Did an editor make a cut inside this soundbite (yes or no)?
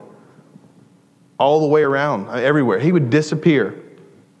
no